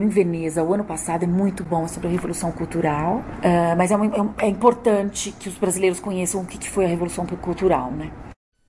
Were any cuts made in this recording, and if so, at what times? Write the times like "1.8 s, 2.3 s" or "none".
none